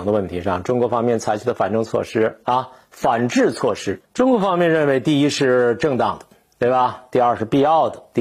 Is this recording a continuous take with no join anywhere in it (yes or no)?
yes